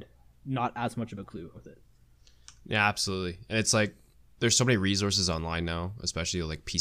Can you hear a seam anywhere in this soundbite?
yes; 2 cuts; at 1.5 s, 4.1 s

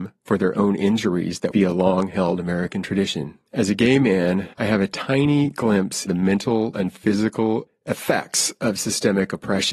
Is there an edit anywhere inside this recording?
yes; 5 cuts; at 1.5 s, 3.5 s, 4.5 s, 6.1 s, 6.7 s

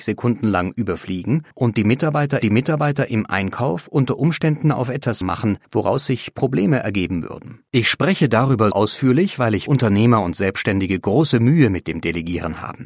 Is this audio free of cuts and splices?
no; 7 cuts; at 1.5 s, 2.4 s, 5.2 s, 5.6 s, 7.7 s, 8.7 s, 9.7 s

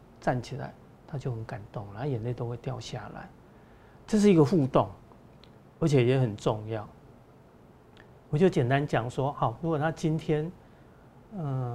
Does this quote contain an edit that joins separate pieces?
no; 0 cuts

